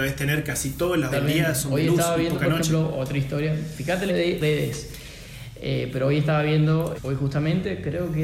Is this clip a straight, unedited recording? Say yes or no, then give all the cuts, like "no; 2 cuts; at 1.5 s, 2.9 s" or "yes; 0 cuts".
no; 4 cuts; at 1.1 s, 4.1 s, 4.4 s, 6.9 s